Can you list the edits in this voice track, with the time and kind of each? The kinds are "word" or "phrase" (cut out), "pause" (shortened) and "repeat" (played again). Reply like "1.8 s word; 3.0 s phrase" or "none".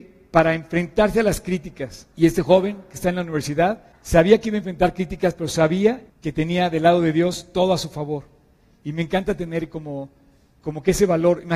2.1 s pause; 3.9 s pause; 6.1 s pause